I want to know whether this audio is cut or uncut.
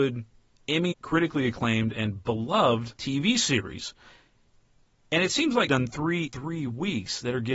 cut